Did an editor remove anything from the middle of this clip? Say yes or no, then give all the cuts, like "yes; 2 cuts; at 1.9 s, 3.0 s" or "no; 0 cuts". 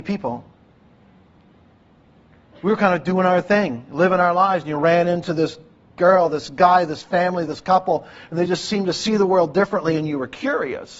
no; 0 cuts